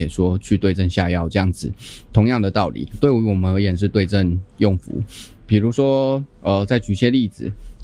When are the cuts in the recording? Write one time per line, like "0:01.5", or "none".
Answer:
none

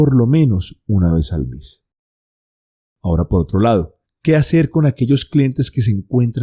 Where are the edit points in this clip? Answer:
0:04.1

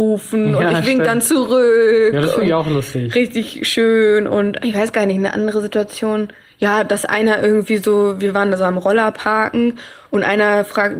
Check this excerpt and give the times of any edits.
none

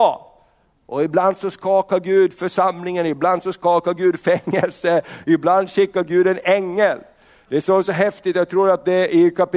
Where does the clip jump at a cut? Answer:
none

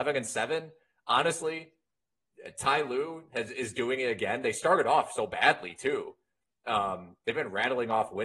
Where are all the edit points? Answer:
none

